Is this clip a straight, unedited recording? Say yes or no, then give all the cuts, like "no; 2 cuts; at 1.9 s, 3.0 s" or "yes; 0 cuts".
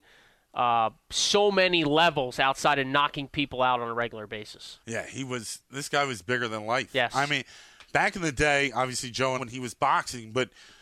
no; 3 cuts; at 1.0 s, 4.8 s, 9.4 s